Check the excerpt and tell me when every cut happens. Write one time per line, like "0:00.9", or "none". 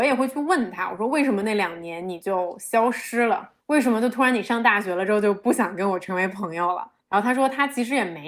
0:03.6
0:07.0